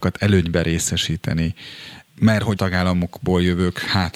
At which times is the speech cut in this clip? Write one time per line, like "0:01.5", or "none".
0:02.1
0:02.6